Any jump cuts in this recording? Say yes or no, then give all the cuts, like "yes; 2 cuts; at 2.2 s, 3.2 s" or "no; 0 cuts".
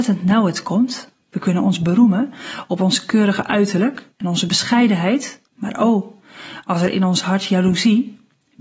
yes; 3 cuts; at 1.2 s, 4.1 s, 5.5 s